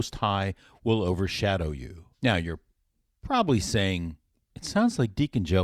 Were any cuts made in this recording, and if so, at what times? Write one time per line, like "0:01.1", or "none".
0:02.1